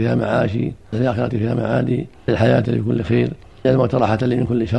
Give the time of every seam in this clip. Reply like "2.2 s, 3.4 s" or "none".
0.9 s, 1.3 s, 2.3 s, 2.6 s, 3.6 s